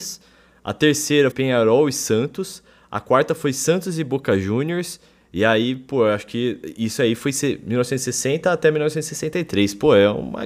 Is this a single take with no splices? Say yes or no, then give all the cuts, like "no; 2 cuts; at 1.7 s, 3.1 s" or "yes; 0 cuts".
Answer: no; 1 cut; at 1.3 s